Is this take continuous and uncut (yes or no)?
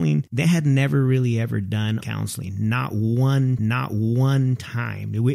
no